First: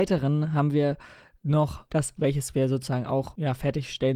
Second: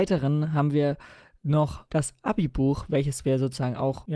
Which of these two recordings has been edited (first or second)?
first